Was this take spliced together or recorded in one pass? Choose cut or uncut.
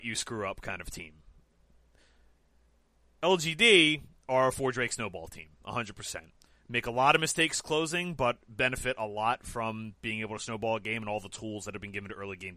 uncut